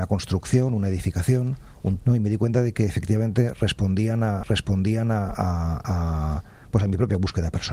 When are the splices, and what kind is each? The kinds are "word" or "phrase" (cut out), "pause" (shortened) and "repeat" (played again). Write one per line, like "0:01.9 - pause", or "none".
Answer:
0:02.0 - word
0:04.4 - repeat